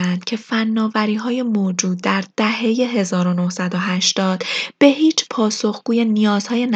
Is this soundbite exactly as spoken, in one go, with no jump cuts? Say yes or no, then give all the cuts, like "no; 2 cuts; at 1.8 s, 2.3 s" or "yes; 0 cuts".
no; 1 cut; at 5.3 s